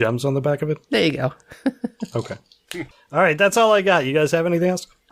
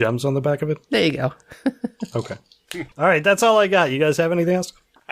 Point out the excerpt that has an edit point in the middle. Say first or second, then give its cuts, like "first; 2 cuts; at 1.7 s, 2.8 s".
second; 1 cut; at 2.9 s